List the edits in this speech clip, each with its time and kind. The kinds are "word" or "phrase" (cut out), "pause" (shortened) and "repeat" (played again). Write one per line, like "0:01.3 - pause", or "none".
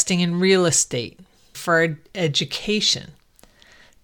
0:01.5 - word